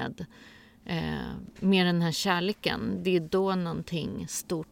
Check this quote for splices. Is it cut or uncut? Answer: uncut